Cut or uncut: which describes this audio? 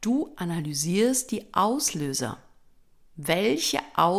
uncut